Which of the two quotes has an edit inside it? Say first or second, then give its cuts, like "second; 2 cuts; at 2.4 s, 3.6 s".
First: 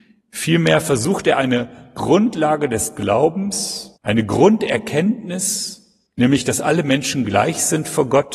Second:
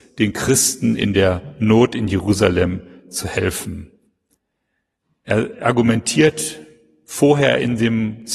first; 2 cuts; at 4.0 s, 6.1 s